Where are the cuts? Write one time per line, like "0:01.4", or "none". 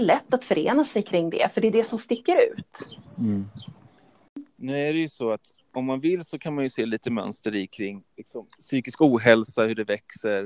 0:05.6
0:08.6